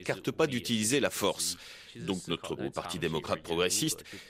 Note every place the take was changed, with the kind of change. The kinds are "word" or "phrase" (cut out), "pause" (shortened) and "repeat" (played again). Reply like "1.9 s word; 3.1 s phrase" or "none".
2.6 s word